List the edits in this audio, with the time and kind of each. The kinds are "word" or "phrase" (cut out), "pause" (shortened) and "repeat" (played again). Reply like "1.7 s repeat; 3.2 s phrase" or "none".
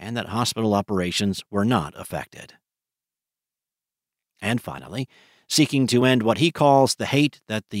none

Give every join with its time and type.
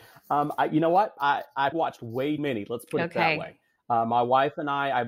1.7 s word; 2.4 s word

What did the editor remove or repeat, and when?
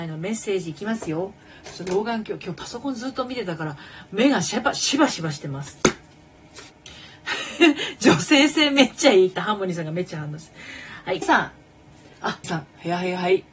6.7 s pause; 11.2 s word; 12.4 s word

